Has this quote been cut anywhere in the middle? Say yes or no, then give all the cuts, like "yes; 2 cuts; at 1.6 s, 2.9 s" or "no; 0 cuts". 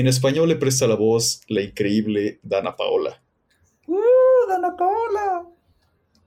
no; 0 cuts